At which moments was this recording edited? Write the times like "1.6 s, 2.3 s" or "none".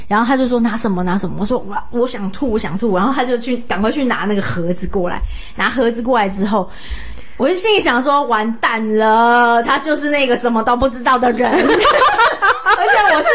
none